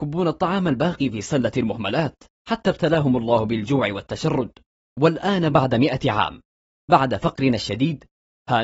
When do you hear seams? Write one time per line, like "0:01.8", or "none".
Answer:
none